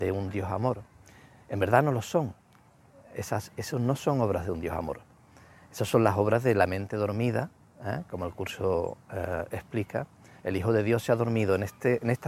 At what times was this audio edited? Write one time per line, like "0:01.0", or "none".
none